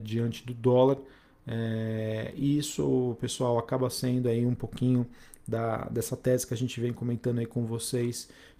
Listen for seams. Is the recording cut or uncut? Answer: uncut